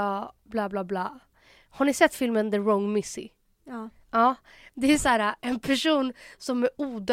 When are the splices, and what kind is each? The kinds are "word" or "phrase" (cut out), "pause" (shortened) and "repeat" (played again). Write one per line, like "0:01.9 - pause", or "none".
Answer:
none